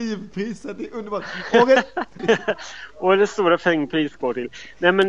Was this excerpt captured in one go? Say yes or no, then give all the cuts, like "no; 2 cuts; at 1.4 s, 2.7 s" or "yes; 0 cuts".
no; 1 cut; at 2.2 s